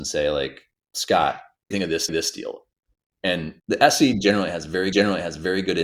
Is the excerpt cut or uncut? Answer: cut